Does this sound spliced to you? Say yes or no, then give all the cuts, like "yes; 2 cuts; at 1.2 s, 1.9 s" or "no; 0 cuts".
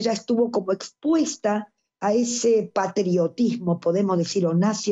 no; 0 cuts